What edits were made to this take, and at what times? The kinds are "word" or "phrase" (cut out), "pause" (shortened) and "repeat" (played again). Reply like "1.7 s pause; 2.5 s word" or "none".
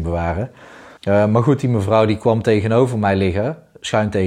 1.0 s pause